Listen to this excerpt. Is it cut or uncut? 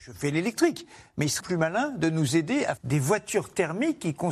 cut